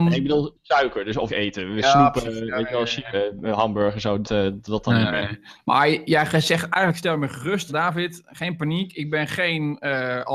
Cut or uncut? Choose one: cut